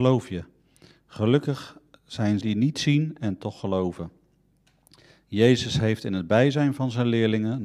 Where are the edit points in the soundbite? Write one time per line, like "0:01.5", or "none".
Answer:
0:02.4